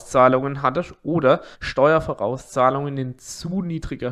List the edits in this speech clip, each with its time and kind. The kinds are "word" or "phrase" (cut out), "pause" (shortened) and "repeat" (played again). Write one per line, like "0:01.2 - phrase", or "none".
0:01.5 - pause